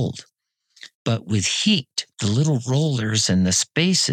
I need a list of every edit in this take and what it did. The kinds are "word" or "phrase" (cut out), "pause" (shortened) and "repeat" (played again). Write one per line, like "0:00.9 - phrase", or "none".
0:00.9 - pause
0:02.1 - pause